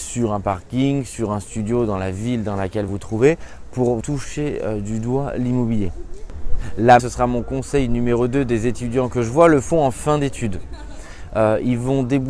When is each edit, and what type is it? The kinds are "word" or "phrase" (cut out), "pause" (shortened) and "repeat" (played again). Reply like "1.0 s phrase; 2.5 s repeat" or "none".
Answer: 2.9 s word; 4.0 s word; 7.0 s word